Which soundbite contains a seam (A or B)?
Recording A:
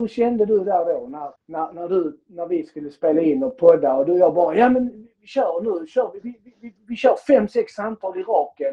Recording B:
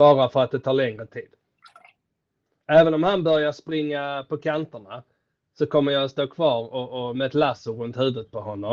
A